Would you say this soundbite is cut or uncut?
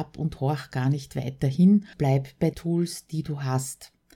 cut